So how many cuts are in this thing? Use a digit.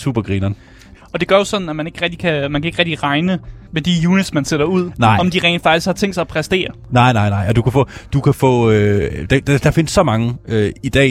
1